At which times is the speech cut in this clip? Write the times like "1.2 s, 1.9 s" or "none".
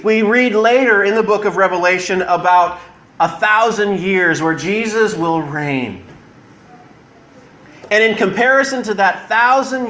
none